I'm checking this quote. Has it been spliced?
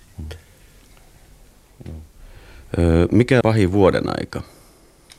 yes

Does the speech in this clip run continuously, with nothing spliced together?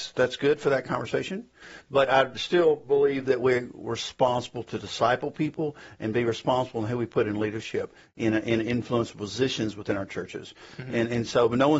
yes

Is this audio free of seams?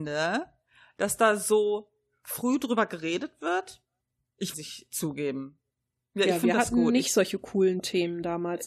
no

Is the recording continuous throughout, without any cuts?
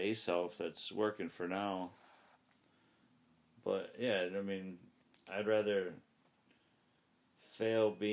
yes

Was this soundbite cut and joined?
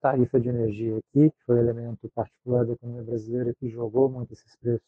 no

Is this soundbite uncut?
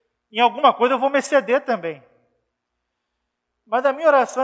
yes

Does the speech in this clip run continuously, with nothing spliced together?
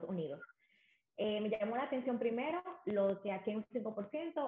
yes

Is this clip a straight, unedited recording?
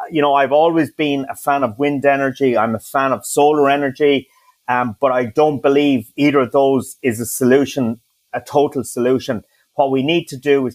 yes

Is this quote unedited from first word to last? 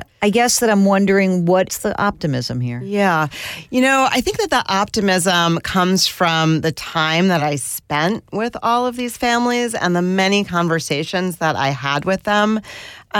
yes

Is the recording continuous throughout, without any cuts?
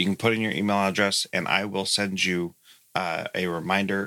yes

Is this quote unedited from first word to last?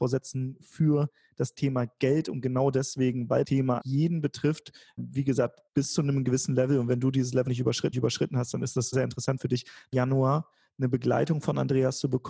no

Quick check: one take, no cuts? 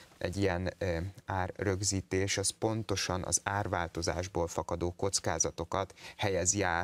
yes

